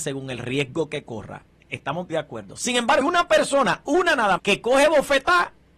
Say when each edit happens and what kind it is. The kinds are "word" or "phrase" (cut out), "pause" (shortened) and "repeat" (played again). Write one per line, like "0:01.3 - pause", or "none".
0:02.1 - word
0:03.0 - word
0:04.4 - word